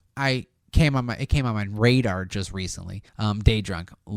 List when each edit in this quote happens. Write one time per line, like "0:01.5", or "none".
0:03.1